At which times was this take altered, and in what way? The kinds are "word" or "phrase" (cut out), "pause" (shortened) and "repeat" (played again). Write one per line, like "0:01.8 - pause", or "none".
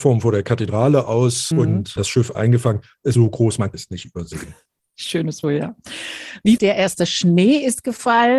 0:01.5 - word
0:02.0 - word
0:02.3 - word
0:03.1 - word
0:03.7 - word
0:05.4 - word
0:06.6 - word